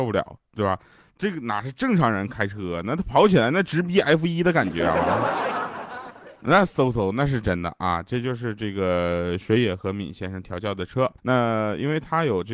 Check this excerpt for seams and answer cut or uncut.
cut